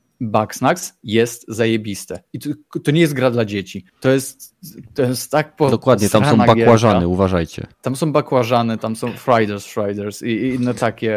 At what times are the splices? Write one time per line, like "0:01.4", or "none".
0:03.9
0:07.7

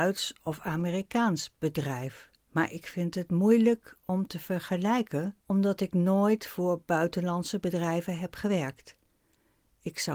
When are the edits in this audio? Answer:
0:02.4
0:05.4

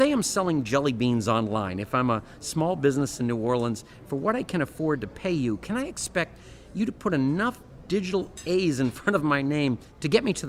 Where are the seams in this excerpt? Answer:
none

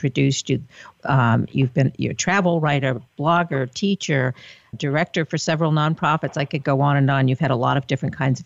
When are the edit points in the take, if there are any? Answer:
0:03.1
0:04.7

